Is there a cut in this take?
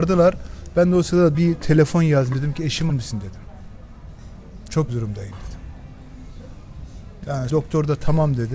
yes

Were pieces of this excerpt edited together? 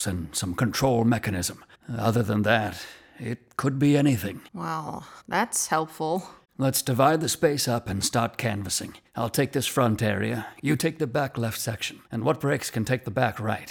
yes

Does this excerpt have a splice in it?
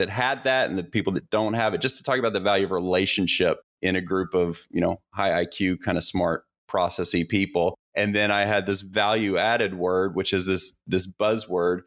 yes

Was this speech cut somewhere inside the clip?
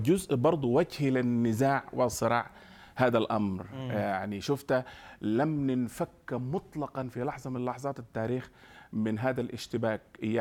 no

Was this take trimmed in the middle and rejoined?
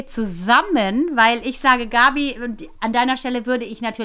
no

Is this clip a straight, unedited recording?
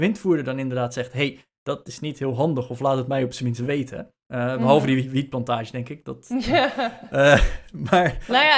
no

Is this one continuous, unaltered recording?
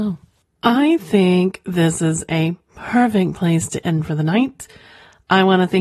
yes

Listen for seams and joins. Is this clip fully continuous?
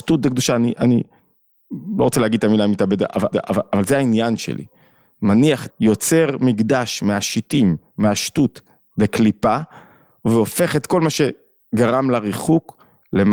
no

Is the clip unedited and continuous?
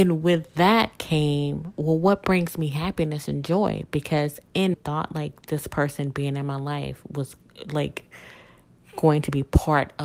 no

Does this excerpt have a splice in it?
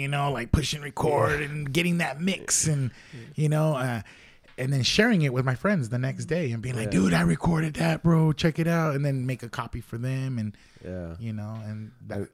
no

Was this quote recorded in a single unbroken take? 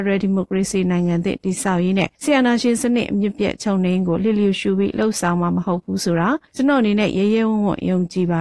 no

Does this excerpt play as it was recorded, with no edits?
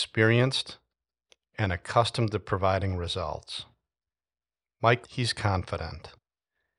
no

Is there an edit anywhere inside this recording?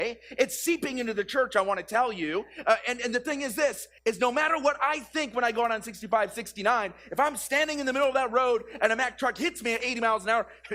yes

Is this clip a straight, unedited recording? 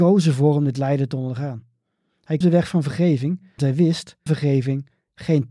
no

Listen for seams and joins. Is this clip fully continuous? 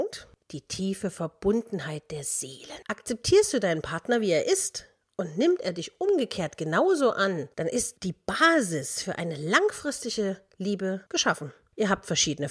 yes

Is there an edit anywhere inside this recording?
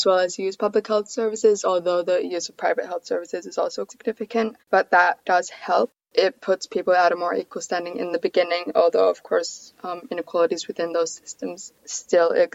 yes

